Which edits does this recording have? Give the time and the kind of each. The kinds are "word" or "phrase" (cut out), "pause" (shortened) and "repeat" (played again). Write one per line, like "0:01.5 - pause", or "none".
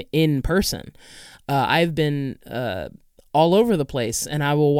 0:02.4 - pause